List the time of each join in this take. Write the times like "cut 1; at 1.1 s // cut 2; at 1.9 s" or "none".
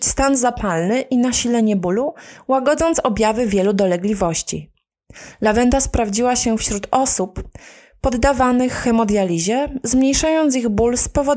none